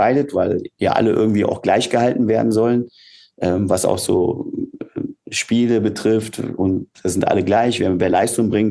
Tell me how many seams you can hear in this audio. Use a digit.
0